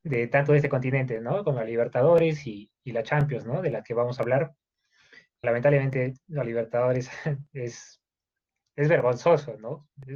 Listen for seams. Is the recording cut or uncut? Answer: cut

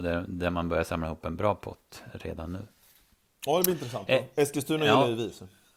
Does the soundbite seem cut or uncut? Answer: uncut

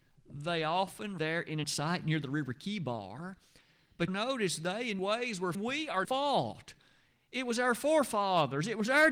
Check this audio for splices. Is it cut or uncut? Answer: cut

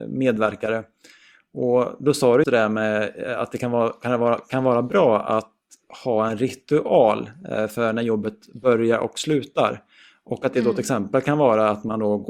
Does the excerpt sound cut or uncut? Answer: cut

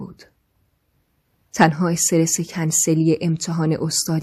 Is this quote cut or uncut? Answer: uncut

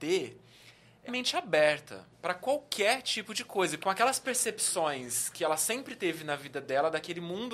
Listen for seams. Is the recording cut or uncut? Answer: cut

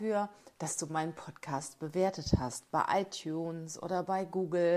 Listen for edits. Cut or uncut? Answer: uncut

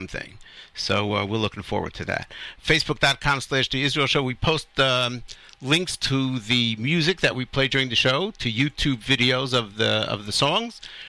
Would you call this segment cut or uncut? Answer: uncut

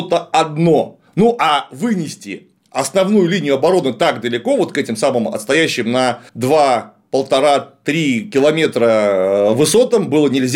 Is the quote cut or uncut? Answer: cut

